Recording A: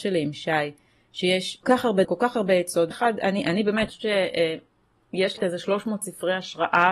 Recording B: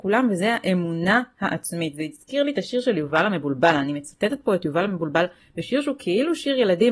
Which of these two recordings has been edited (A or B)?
A